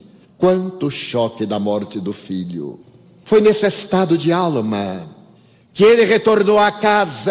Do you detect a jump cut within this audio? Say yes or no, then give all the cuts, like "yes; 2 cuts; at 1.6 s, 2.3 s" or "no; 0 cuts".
no; 0 cuts